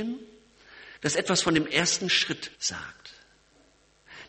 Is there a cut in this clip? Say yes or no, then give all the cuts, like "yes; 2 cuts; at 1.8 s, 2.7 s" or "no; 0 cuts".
yes; 2 cuts; at 1.0 s, 2.5 s